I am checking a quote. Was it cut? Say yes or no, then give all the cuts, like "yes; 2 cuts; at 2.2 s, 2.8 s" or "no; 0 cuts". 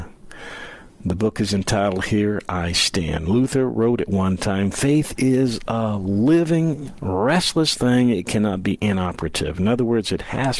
no; 0 cuts